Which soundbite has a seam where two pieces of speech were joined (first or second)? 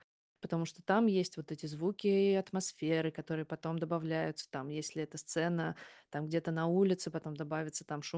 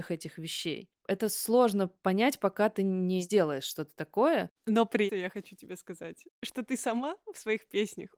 second